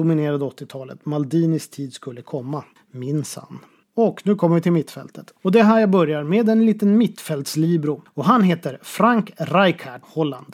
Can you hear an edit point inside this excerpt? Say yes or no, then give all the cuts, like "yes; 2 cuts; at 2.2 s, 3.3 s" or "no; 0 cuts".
no; 0 cuts